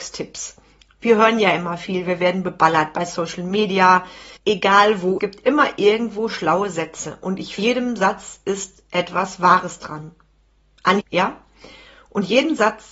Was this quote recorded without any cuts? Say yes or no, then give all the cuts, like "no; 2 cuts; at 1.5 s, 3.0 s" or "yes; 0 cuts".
no; 4 cuts; at 4.4 s, 5.2 s, 7.6 s, 11.0 s